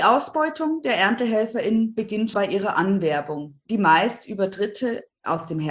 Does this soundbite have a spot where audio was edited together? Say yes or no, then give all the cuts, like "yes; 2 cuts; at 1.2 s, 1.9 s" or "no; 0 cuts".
yes; 1 cut; at 2.3 s